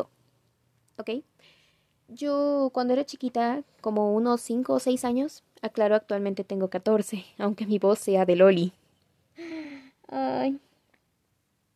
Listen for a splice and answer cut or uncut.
uncut